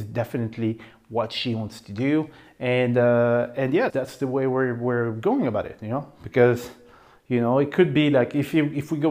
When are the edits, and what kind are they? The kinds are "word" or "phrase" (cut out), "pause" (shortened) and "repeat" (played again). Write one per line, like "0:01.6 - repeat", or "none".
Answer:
0:03.9 - word